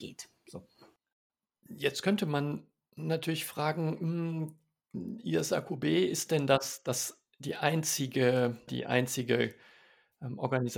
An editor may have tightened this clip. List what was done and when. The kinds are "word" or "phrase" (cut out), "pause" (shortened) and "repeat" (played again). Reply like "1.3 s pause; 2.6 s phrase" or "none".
8.7 s phrase